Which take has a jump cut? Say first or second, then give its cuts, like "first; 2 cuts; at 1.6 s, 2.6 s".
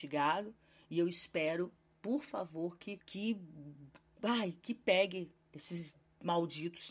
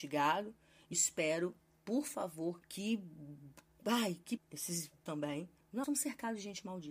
second; 5 cuts; at 0.9 s, 2.6 s, 4.4 s, 5.1 s, 5.8 s